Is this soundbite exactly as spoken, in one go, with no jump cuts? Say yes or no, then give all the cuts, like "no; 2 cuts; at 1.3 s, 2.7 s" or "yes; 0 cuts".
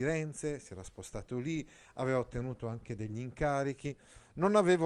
yes; 0 cuts